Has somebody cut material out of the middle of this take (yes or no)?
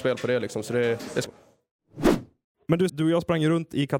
yes